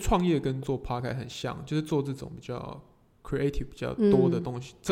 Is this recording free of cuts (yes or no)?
yes